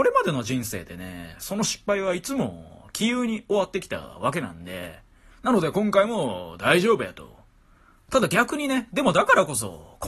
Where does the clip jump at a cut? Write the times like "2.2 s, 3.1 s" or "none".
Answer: none